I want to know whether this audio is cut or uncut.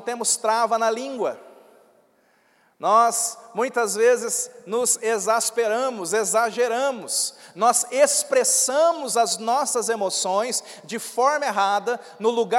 uncut